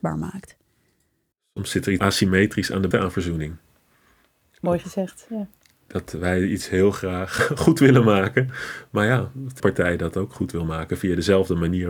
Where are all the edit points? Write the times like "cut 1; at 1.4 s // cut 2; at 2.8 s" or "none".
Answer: cut 1; at 2.0 s // cut 2; at 2.9 s // cut 3; at 7.4 s // cut 4; at 9.6 s